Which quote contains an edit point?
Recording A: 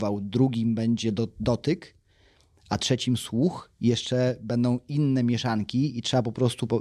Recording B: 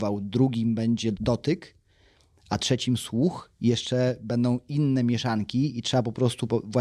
B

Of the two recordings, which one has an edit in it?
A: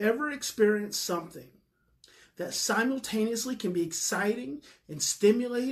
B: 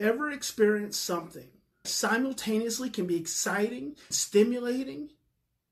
B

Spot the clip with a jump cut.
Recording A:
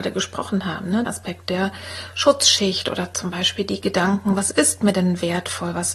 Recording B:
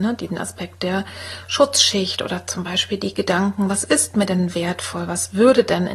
A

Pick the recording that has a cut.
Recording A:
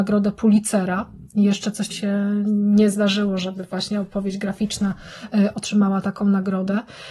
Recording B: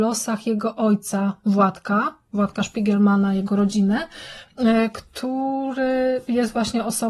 A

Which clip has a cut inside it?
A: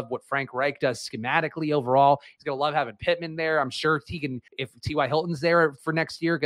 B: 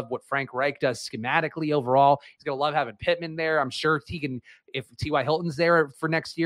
A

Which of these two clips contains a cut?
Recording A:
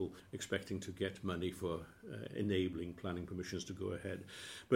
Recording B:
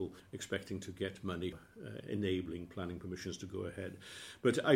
B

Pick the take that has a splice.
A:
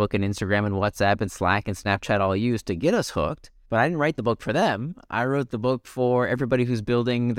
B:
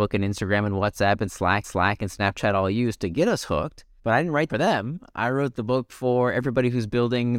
B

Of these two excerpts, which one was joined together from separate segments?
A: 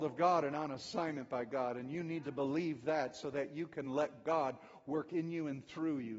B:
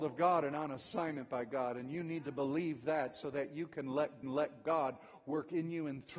B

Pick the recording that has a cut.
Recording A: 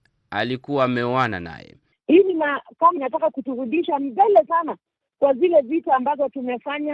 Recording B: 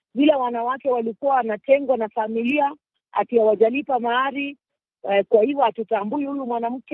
A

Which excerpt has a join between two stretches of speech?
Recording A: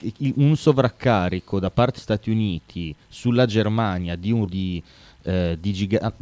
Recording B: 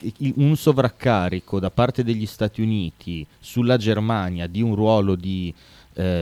A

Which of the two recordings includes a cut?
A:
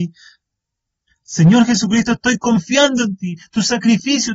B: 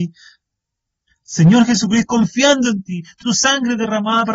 B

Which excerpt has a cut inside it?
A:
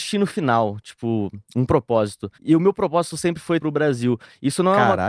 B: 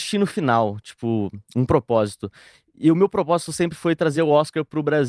A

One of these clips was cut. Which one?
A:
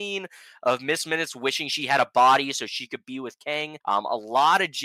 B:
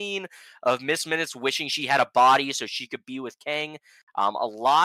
A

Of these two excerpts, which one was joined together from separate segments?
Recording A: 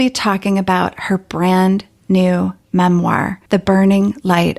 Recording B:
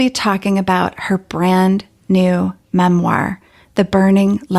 A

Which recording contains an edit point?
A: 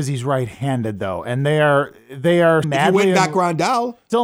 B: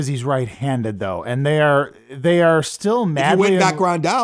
A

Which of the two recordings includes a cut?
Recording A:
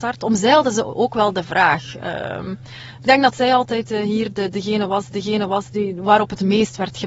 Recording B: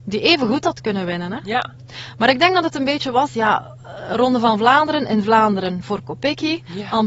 A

